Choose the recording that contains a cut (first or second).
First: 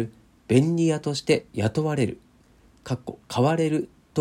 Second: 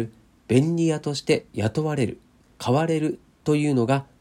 second